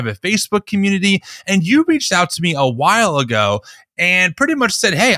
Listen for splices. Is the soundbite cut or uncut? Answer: uncut